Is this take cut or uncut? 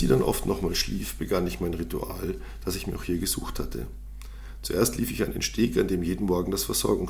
uncut